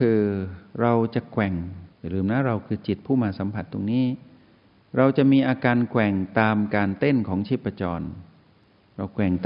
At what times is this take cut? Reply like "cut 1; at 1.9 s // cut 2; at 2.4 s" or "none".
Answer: cut 1; at 1.9 s